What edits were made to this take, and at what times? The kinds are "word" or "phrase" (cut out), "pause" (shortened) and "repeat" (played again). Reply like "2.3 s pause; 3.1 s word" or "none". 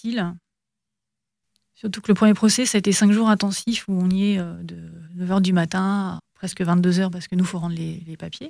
6.2 s word